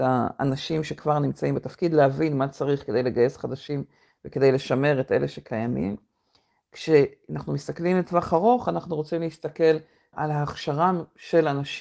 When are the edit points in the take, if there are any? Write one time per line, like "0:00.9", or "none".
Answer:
0:10.1